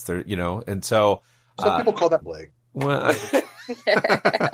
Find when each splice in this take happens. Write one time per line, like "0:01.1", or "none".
0:02.2